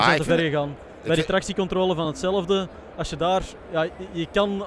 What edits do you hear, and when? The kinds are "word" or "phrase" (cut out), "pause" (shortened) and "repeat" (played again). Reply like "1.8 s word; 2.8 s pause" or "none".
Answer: none